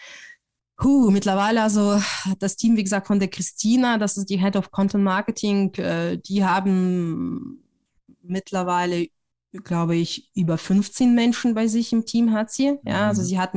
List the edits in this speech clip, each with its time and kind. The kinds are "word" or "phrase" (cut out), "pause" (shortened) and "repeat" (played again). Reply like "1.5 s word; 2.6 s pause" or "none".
none